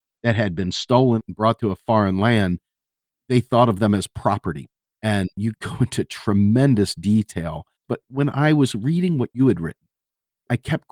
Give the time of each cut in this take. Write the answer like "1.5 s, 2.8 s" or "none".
4.9 s, 7.8 s